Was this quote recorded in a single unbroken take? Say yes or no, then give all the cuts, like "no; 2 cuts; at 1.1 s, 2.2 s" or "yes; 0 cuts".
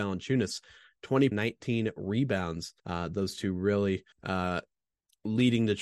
no; 3 cuts; at 1.3 s, 2.8 s, 4.1 s